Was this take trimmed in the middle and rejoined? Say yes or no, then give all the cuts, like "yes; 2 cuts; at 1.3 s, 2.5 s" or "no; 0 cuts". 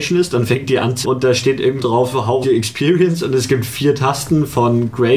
yes; 3 cuts; at 1.0 s, 1.8 s, 2.4 s